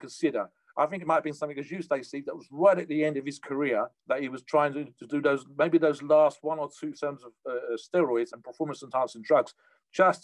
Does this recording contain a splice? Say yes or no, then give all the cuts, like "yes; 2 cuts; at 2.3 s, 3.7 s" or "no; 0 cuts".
yes; 3 cuts; at 4.0 s, 6.9 s, 8.3 s